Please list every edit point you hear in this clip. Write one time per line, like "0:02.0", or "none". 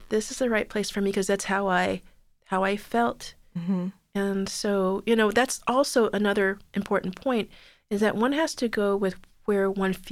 none